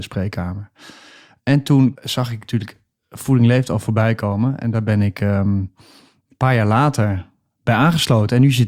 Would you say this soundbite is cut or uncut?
uncut